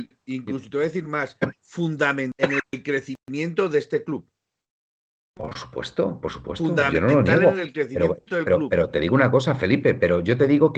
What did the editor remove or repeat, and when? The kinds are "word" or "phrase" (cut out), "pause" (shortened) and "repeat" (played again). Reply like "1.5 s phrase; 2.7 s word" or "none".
none